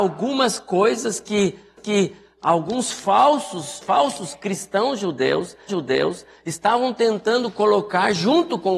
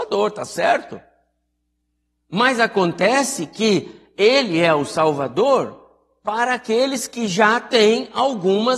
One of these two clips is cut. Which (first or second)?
first